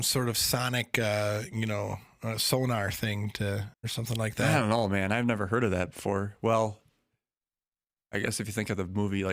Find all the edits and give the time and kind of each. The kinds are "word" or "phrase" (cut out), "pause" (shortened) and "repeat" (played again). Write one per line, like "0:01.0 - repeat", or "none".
0:03.7 - pause